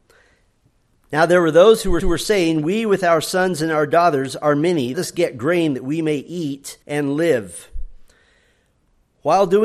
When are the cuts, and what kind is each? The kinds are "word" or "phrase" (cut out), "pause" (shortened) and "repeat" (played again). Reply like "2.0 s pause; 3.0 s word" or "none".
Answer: 2.0 s repeat; 4.9 s phrase; 6.8 s pause